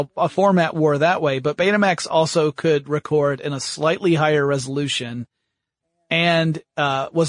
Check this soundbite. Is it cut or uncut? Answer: uncut